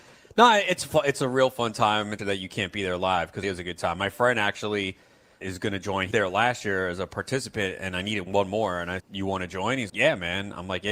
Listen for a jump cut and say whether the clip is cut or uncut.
cut